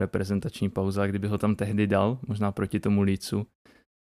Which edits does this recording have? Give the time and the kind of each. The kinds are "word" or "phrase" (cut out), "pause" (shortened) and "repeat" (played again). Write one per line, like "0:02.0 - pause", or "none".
none